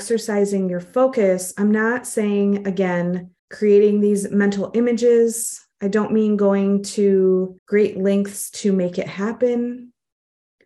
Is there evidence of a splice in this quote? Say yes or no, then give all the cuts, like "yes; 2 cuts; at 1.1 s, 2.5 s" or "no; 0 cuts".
yes; 2 cuts; at 3.4 s, 7.6 s